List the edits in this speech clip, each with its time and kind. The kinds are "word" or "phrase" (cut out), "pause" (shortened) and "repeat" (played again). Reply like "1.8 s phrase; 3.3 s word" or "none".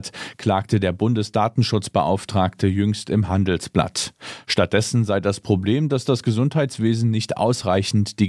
none